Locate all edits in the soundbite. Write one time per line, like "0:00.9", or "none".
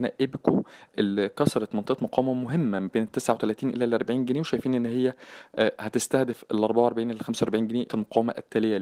0:07.9